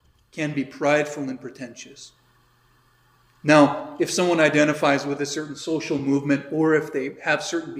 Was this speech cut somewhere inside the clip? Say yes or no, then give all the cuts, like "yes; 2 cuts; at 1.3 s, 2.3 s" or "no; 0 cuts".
no; 0 cuts